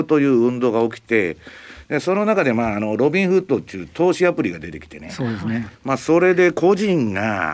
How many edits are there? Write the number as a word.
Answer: one